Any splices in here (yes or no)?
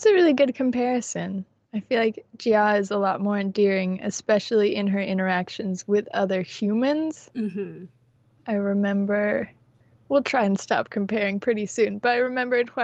no